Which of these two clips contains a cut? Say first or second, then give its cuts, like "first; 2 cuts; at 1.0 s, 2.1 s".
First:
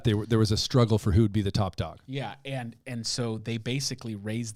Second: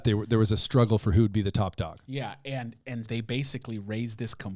second; 1 cut; at 3.0 s